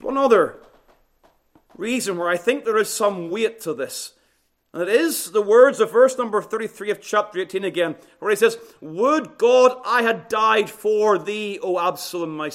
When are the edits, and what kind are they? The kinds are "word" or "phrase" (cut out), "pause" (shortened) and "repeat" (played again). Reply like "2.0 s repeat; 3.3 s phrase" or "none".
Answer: none